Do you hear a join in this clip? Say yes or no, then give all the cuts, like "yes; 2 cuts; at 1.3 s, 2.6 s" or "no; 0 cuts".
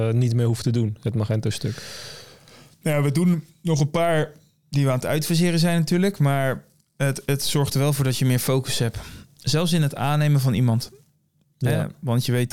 no; 0 cuts